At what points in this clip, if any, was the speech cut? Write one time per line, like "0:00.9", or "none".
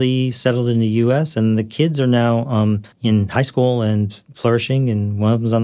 0:02.9